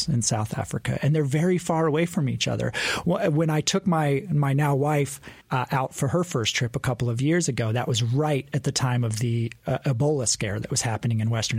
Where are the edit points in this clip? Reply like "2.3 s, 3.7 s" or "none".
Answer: 5.4 s